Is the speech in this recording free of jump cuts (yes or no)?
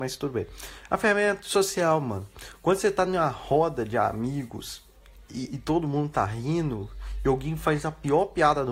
yes